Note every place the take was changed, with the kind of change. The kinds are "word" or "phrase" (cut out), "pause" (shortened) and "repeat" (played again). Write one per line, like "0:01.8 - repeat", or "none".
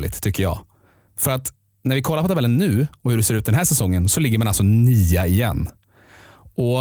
none